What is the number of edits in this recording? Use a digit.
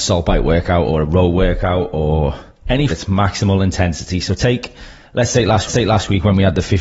2